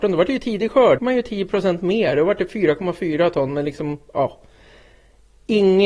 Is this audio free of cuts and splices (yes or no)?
no